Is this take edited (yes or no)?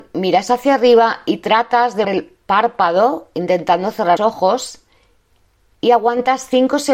yes